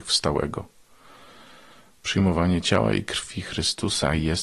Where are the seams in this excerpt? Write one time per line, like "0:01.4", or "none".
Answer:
none